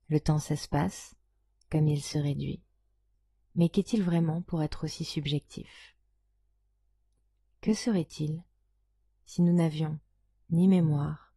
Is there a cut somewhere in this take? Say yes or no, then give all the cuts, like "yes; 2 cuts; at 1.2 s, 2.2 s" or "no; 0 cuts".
no; 0 cuts